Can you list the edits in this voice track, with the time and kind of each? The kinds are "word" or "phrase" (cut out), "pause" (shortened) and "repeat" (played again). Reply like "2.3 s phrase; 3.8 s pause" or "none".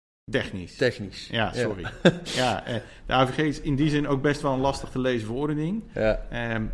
none